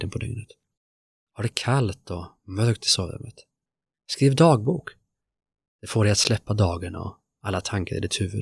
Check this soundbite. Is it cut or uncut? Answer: uncut